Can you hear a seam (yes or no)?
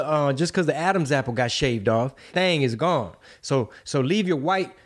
yes